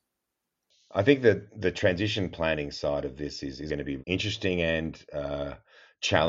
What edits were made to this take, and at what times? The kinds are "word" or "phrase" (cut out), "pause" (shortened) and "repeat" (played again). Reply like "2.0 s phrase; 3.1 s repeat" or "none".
3.7 s word; 4.0 s word